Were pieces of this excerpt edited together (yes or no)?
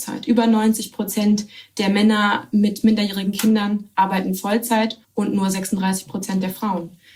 yes